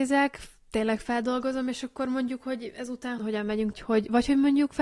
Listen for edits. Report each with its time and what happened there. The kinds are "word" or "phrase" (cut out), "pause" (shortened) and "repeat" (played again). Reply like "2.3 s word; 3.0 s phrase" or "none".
3.2 s word; 3.7 s phrase

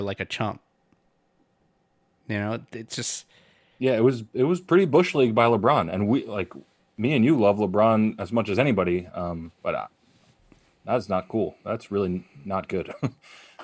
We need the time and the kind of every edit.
none

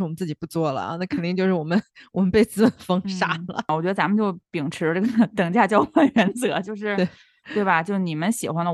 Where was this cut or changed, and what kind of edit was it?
none

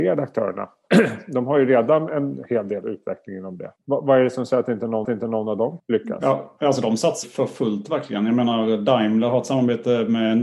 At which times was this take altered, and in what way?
3.8 s pause; 5.0 s repeat; 5.8 s word; 7.2 s word

